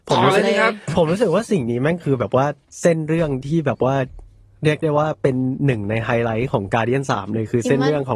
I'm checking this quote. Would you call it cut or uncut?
uncut